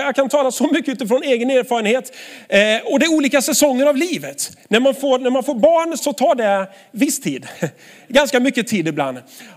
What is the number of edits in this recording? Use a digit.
1